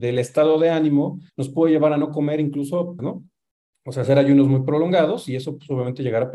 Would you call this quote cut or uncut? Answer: cut